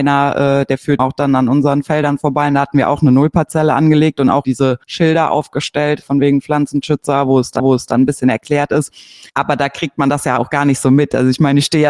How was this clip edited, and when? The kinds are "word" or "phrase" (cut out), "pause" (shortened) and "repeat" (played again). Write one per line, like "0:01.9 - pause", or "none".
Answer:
0:01.0 - word
0:04.4 - word
0:04.8 - pause
0:06.0 - word
0:07.6 - repeat
0:09.3 - pause